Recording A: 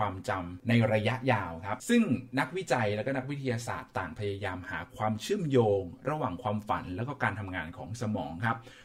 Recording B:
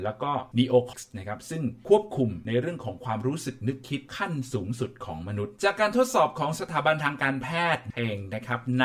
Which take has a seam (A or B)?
B